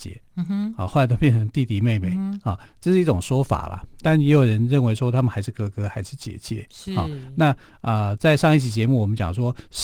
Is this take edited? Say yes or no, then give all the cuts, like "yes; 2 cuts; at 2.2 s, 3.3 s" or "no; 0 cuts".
no; 0 cuts